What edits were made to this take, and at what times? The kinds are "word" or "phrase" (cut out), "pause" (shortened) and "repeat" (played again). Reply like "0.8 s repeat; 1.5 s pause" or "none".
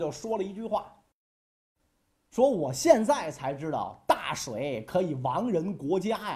none